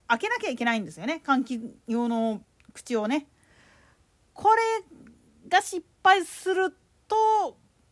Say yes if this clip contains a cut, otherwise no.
no